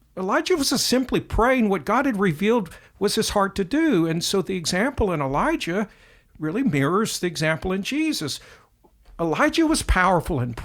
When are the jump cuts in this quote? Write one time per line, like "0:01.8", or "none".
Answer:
none

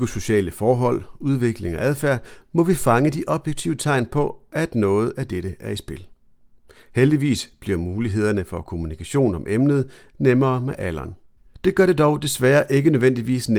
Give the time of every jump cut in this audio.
none

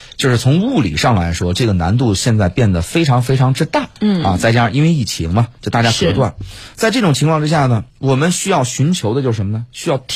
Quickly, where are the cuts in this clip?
0:04.0
0:07.9

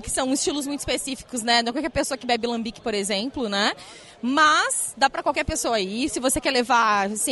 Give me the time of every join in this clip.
none

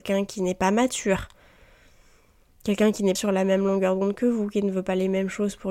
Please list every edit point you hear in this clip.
0:03.2

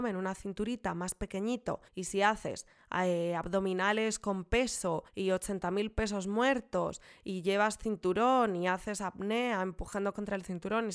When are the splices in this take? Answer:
0:01.9
0:05.1

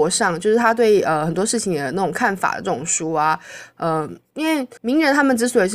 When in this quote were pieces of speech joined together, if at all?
0:04.8

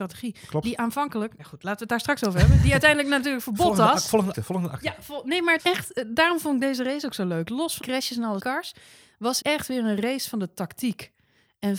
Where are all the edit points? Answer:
0:01.4
0:04.3
0:05.6
0:07.8
0:08.4
0:09.4

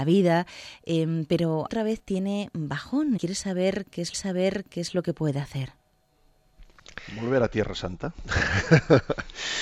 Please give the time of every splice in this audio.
0:01.7
0:03.2
0:04.1

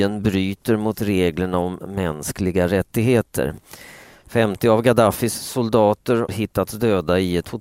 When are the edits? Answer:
0:06.3

